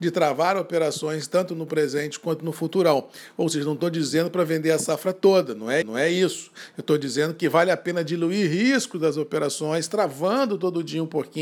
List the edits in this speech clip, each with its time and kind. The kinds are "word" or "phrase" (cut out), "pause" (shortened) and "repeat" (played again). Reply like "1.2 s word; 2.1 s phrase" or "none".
5.8 s repeat